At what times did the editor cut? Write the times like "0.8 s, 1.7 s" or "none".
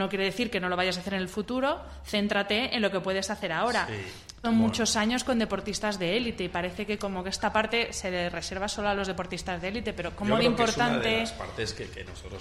4.4 s

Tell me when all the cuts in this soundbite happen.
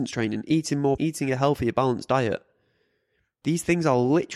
1.0 s

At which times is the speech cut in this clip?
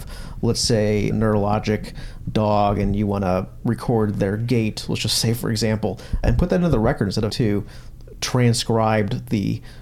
1.1 s, 6.2 s, 7.3 s

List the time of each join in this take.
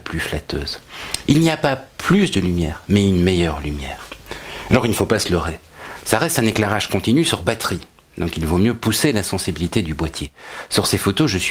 none

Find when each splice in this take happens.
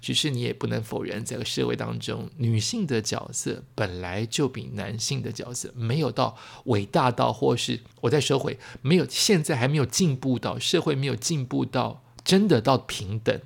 7.9 s

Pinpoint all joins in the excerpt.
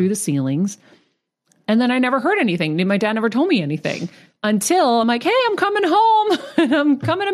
none

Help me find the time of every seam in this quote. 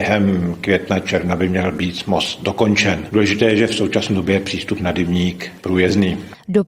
5.6 s

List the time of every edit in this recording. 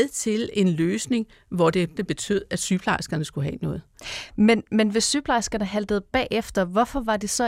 2.0 s

